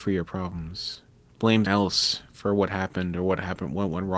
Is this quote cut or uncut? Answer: cut